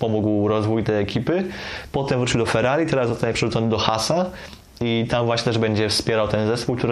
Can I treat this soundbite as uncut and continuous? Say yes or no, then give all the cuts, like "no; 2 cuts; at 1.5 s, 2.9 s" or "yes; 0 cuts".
yes; 0 cuts